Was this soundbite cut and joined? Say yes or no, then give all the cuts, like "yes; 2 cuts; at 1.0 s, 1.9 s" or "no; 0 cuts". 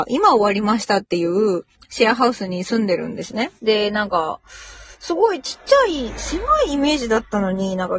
yes; 2 cuts; at 1.7 s, 3.6 s